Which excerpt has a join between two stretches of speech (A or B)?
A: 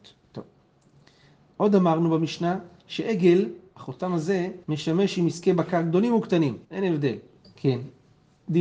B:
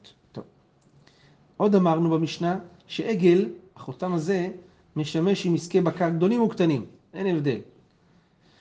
A